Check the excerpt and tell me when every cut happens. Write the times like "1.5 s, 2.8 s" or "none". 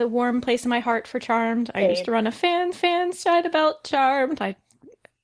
2.7 s